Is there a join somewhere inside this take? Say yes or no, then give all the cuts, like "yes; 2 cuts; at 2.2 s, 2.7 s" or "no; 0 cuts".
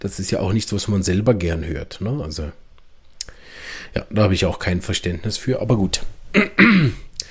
no; 0 cuts